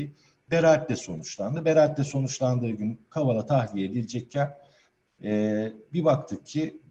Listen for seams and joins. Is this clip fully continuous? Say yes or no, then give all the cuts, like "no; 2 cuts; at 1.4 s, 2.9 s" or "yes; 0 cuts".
yes; 0 cuts